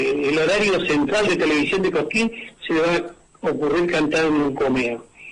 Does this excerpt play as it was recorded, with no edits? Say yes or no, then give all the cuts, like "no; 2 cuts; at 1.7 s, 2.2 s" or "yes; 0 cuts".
yes; 0 cuts